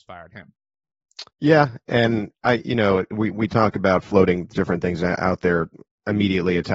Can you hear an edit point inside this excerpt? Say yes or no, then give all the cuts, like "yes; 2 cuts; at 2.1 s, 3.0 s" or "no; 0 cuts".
yes; 1 cut; at 1.3 s